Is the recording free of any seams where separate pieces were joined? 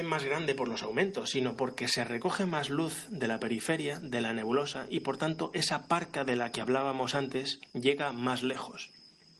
no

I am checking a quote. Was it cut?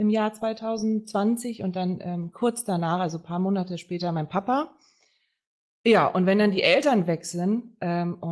no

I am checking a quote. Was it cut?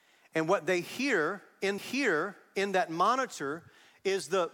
yes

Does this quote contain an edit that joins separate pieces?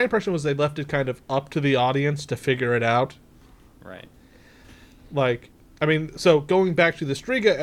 no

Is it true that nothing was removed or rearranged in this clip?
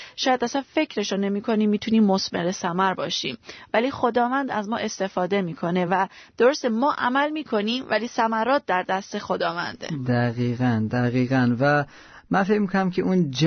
yes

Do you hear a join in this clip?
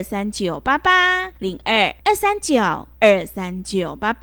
yes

